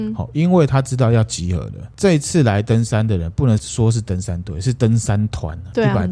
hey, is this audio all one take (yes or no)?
yes